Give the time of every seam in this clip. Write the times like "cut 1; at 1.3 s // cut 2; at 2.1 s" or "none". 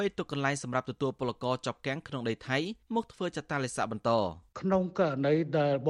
cut 1; at 2.8 s // cut 2; at 4.5 s